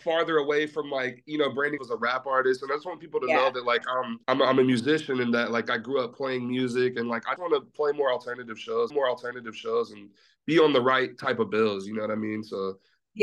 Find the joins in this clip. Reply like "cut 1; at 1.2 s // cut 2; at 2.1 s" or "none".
cut 1; at 1.8 s // cut 2; at 4.2 s // cut 3; at 7.4 s // cut 4; at 8.9 s